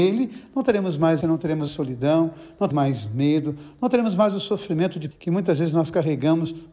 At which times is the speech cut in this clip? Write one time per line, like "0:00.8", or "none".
0:01.2
0:01.7
0:02.7
0:05.1